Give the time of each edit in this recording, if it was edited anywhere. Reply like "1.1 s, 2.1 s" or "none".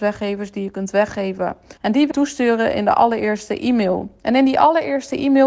1.8 s, 2.1 s